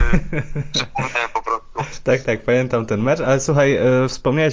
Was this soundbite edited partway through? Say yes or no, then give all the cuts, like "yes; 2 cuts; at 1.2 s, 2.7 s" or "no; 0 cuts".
yes; 1 cut; at 2.2 s